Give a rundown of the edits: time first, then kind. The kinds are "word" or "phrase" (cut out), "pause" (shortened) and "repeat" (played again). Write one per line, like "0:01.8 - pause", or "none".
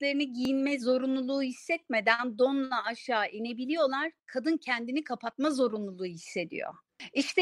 none